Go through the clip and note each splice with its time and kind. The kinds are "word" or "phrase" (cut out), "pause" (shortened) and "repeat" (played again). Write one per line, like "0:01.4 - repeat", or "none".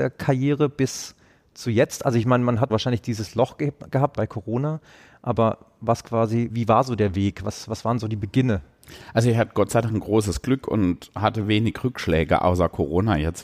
0:02.7 - word
0:04.2 - word
0:06.5 - word